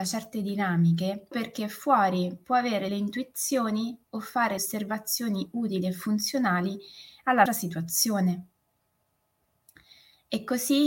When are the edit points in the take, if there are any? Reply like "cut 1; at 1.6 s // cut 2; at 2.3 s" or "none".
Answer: cut 1; at 1.3 s // cut 2; at 2.9 s // cut 3; at 4.6 s // cut 4; at 7.5 s